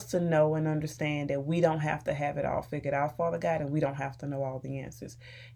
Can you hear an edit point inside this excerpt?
no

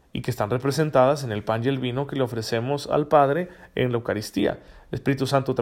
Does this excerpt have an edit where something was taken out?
no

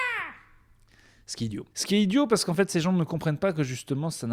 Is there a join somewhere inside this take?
yes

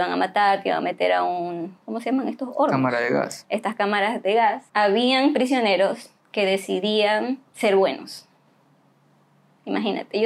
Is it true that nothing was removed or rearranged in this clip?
no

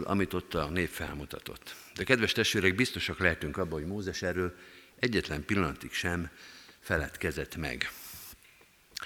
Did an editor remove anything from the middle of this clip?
no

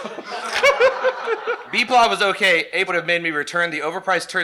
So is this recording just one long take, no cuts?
no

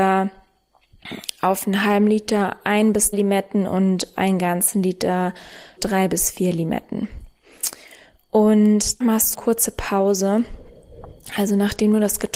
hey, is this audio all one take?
no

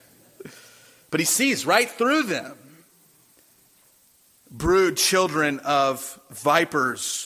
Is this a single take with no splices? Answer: yes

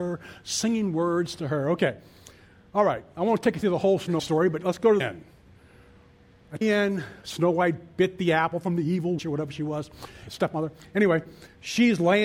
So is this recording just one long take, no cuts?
no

